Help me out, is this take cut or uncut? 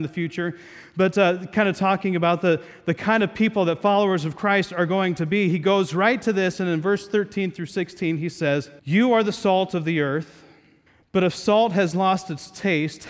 cut